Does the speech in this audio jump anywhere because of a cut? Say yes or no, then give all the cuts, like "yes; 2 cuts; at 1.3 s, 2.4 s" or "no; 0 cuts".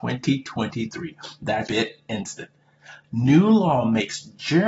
yes; 1 cut; at 1.7 s